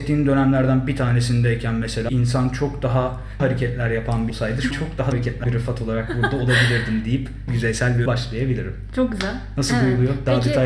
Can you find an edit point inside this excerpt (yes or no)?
yes